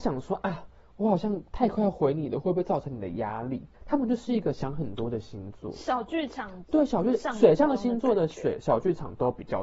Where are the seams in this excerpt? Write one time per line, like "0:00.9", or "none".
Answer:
0:03.7

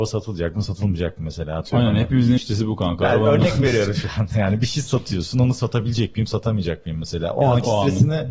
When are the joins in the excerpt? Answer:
0:02.4

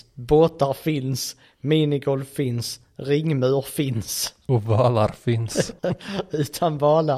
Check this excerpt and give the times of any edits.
0:05.8

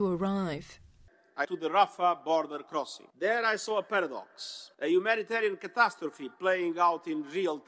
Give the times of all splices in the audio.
0:01.4
0:03.1
0:04.7

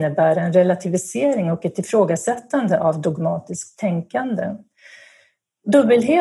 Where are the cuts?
none

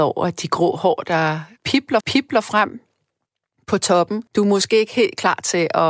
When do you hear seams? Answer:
0:02.0
0:04.3

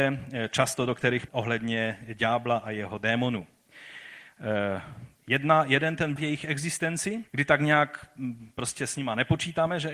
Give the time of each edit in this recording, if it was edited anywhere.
0:01.3
0:06.2
0:07.3

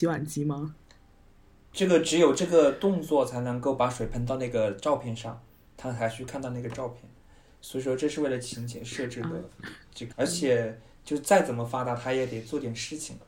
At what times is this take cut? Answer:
0:10.1

